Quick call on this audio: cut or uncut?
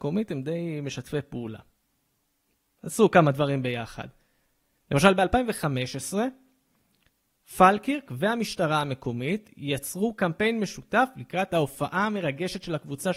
uncut